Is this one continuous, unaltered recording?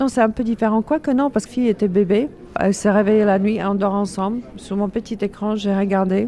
no; 1 cut; at 1.5 s

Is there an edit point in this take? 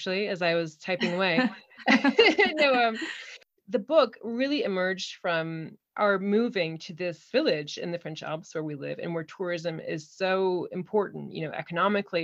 no; 0 cuts

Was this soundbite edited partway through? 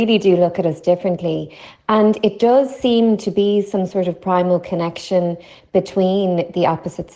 no; 0 cuts

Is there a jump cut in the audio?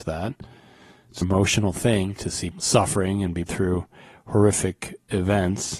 yes; 3 cuts; at 1.2 s, 2.5 s, 3.5 s

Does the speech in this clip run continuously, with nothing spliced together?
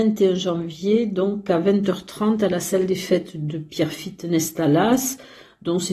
yes; 0 cuts

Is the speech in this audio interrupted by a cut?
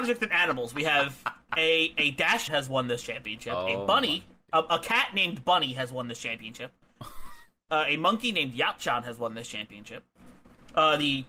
yes; 1 cut; at 2.5 s

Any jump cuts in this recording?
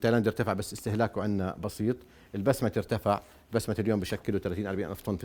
no; 0 cuts

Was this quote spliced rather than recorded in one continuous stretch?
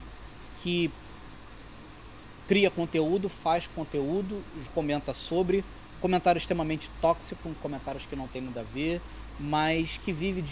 yes; 1 cut; at 4.7 s

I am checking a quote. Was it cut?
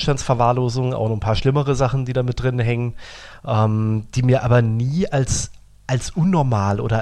no; 0 cuts

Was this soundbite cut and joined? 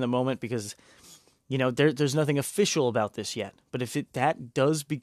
no; 0 cuts

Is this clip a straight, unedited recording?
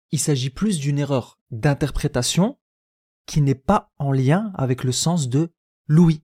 yes; 0 cuts

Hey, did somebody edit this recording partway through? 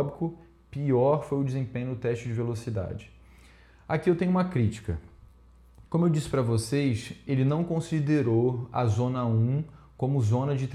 yes; 1 cut; at 5.9 s

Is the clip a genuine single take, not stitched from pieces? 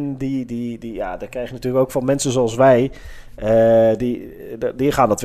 yes; 0 cuts

